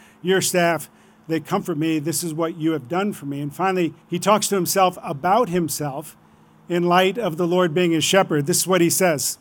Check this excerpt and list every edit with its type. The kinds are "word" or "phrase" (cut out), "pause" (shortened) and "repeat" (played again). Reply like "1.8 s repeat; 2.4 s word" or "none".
4.0 s pause